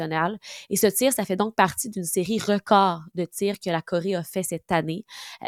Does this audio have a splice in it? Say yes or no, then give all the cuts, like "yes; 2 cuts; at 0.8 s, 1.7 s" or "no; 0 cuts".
no; 0 cuts